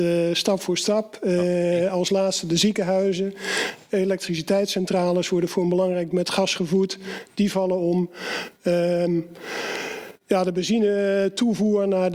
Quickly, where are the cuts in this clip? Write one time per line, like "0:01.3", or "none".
0:06.1